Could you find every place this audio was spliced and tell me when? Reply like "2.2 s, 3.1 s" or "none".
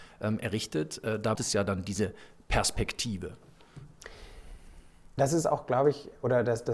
1.3 s